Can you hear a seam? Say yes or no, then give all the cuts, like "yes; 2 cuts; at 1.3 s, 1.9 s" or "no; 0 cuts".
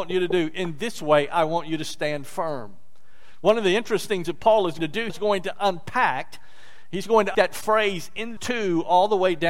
yes; 5 cuts; at 4.2 s, 4.8 s, 5.1 s, 7.3 s, 8.4 s